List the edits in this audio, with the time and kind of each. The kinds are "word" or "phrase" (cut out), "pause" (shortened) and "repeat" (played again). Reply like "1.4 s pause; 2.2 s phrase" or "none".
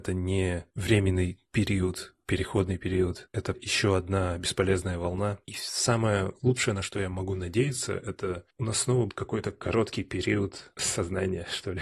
3.5 s word; 9.1 s word